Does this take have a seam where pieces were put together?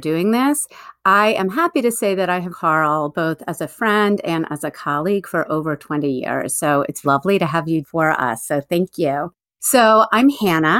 yes; 3 cuts; at 2.5 s, 7.0 s, 7.8 s

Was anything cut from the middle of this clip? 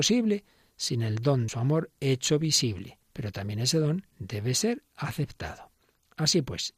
yes; 3 cuts; at 1.5 s, 3.0 s, 4.1 s

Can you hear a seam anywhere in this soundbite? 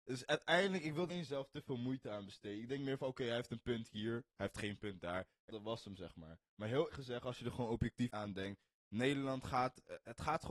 yes; 4 cuts; at 1.1 s, 5.5 s, 6.9 s, 8.1 s

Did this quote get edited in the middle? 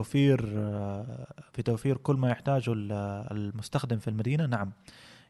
yes; 1 cut; at 1.5 s

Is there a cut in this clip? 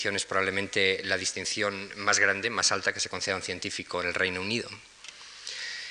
no; 0 cuts

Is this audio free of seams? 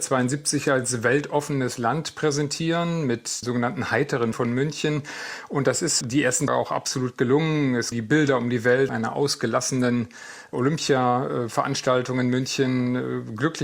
no; 6 cuts; at 3.4 s, 4.3 s, 6.0 s, 6.5 s, 7.9 s, 8.9 s

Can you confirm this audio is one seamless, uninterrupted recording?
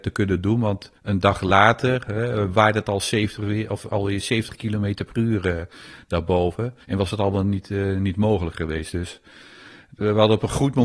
no; 2 cuts; at 1.0 s, 6.8 s

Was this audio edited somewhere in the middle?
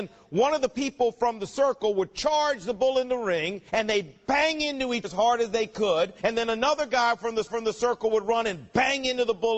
yes; 4 cuts; at 3.7 s, 5.0 s, 6.2 s, 7.5 s

